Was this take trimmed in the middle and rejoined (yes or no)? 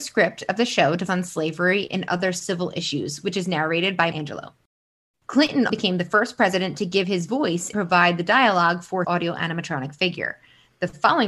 yes